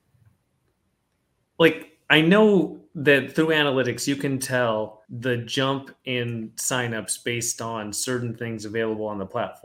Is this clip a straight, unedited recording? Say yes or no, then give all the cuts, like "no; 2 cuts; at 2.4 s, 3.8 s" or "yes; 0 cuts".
no; 1 cut; at 5.0 s